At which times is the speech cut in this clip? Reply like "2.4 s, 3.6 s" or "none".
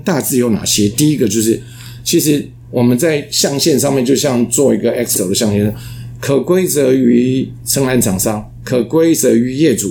5.1 s